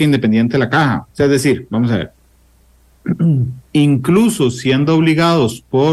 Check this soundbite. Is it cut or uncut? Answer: cut